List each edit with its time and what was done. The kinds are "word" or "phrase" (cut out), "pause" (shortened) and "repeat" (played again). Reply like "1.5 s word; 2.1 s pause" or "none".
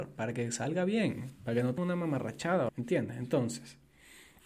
1.8 s word; 2.7 s word